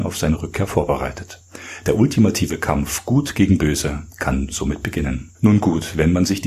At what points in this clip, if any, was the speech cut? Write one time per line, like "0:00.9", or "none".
0:05.3